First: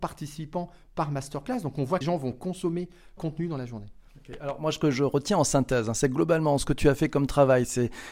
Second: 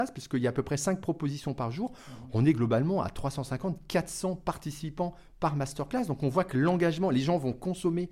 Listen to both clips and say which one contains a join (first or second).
first